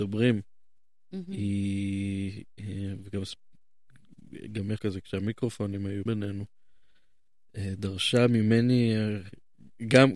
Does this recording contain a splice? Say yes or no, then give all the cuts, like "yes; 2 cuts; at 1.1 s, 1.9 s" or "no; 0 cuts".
yes; 2 cuts; at 4.8 s, 6.1 s